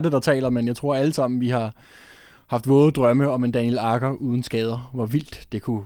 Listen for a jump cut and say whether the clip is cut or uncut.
uncut